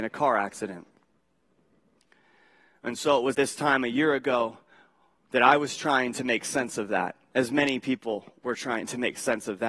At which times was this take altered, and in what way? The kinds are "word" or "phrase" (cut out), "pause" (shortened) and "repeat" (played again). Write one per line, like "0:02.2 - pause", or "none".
0:03.3 - word